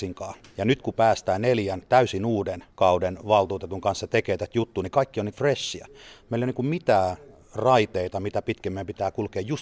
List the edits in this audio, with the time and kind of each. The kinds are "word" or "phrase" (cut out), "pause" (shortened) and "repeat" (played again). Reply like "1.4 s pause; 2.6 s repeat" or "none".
2.7 s pause; 5.3 s word